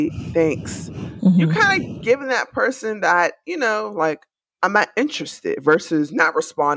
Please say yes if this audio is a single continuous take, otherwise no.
yes